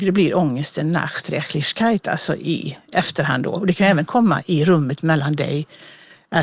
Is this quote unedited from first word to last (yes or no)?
yes